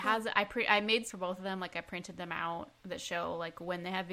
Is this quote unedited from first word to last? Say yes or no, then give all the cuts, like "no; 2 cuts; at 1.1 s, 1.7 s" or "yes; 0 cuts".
no; 2 cuts; at 1.1 s, 2.8 s